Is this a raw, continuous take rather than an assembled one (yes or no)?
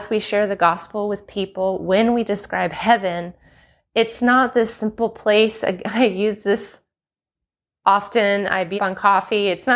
no